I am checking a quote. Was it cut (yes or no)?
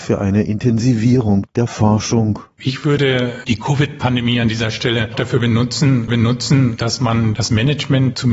yes